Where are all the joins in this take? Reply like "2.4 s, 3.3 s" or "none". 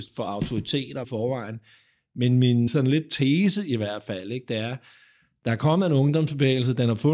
1.0 s, 2.7 s